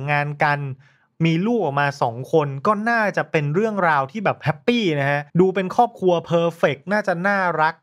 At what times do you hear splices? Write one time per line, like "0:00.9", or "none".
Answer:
0:05.3